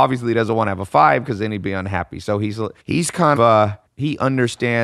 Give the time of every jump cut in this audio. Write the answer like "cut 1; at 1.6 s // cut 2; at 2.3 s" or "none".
cut 1; at 2.8 s // cut 2; at 3.4 s // cut 3; at 3.9 s